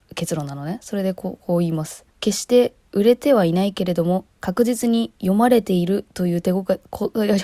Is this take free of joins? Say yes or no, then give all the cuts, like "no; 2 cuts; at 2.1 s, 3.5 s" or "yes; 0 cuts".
no; 2 cuts; at 2.1 s, 4.3 s